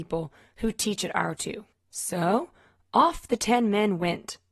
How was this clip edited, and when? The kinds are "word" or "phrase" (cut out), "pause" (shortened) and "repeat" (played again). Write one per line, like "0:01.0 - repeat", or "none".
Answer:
0:01.4 - word